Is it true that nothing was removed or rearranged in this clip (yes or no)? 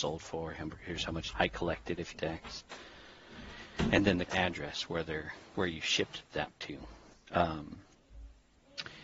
no